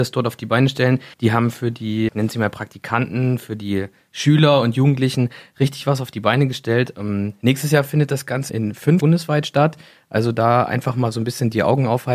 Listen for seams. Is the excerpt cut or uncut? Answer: cut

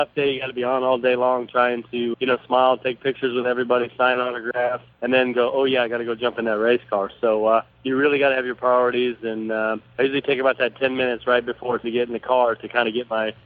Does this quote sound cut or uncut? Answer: cut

